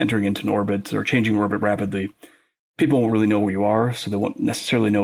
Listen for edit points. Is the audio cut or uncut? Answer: uncut